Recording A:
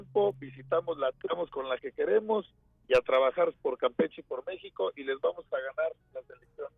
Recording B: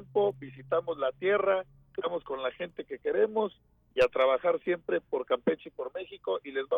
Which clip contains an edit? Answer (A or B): A